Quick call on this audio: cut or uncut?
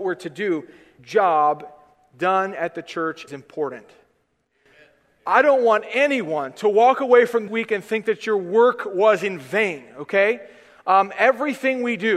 cut